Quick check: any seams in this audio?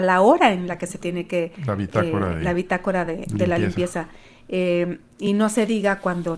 no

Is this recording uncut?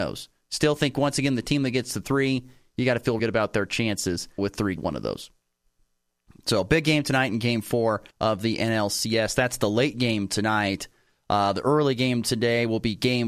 no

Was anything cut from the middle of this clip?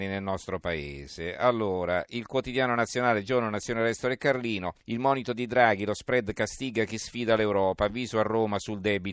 yes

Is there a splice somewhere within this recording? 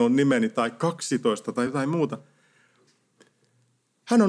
no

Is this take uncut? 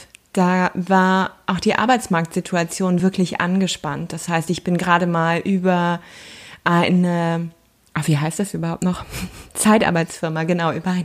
yes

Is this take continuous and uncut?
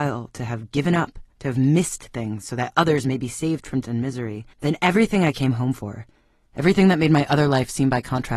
no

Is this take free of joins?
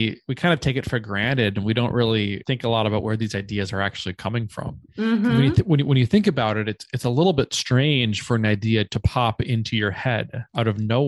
yes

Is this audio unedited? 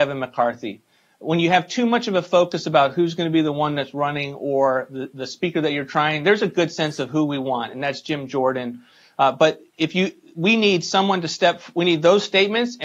yes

